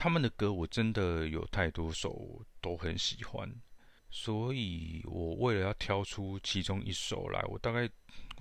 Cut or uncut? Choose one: cut